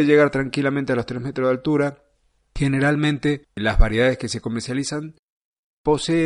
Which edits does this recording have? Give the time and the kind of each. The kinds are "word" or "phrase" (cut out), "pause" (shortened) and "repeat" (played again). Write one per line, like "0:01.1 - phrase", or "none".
none

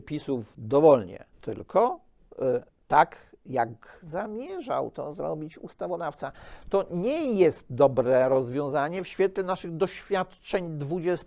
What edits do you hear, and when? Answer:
0:01.3 - pause
0:02.7 - pause

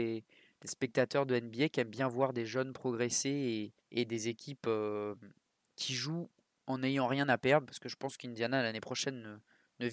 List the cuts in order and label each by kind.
0:03.8 - pause

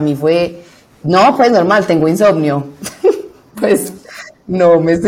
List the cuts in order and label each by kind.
none

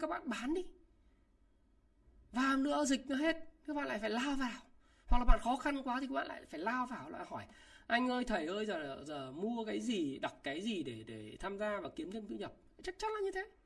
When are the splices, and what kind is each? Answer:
none

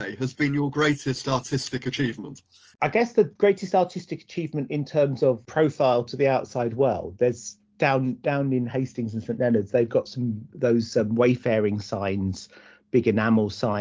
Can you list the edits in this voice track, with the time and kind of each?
none

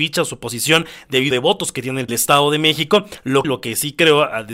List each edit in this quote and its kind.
0:01.3 - phrase
0:02.1 - phrase
0:03.4 - phrase

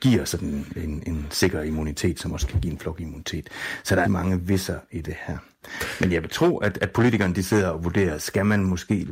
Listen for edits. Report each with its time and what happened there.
0:04.0 - phrase

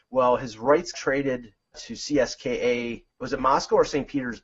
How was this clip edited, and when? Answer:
0:00.9 - word
0:01.7 - word
0:03.1 - pause

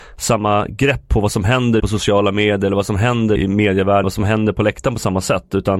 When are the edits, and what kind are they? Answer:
0:01.8 - word
0:03.4 - word
0:04.0 - word

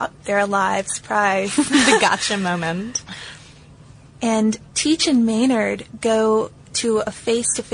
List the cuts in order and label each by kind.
none

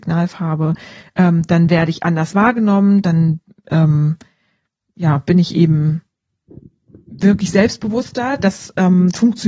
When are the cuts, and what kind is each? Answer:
none

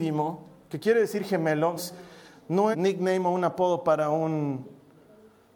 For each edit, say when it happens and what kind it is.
0:01.8 - word
0:02.7 - phrase

